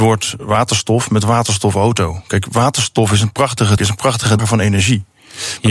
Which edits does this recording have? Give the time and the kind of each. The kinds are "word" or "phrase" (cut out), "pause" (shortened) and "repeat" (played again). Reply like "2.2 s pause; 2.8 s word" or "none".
3.8 s word; 4.4 s word